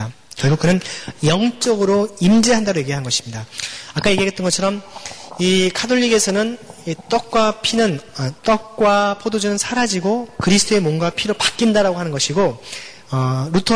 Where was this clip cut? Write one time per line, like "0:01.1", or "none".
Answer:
0:08.4